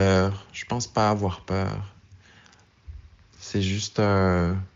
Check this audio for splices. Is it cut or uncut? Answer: uncut